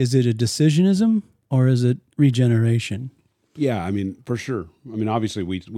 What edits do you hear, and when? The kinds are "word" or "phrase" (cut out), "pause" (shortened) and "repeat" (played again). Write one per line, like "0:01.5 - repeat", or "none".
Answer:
none